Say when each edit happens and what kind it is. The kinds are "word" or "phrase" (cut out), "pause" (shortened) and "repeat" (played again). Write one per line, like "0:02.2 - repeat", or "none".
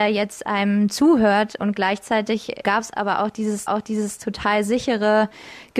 0:02.6 - word
0:03.7 - repeat